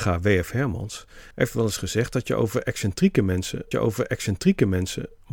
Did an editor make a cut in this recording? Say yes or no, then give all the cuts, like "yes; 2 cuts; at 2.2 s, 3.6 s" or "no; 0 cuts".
yes; 2 cuts; at 1.3 s, 3.7 s